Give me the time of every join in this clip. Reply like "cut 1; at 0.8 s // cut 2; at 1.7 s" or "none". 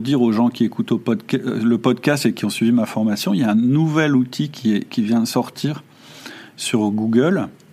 none